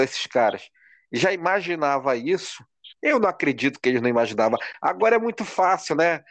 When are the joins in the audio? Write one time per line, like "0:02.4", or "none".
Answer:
none